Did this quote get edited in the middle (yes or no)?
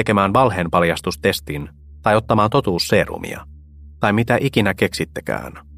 no